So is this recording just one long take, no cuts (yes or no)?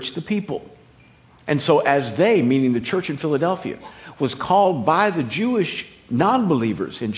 yes